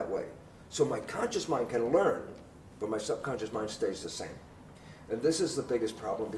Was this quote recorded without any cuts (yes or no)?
no